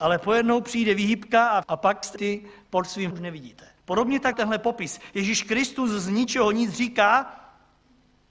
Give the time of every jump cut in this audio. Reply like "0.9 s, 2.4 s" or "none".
1.6 s, 2.2 s, 3.1 s, 3.8 s, 4.3 s